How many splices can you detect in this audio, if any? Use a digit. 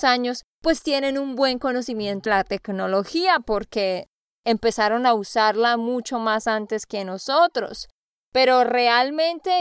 1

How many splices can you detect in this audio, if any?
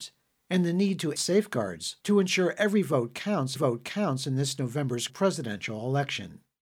4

